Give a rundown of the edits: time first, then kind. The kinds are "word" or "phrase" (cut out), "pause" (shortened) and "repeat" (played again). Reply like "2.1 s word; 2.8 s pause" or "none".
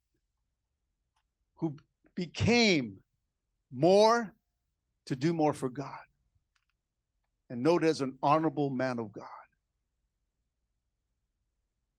none